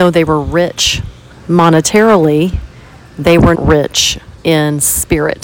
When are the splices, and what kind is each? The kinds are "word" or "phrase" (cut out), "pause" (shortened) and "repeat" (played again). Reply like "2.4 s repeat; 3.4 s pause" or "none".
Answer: 1.3 s pause; 3.6 s word; 4.4 s pause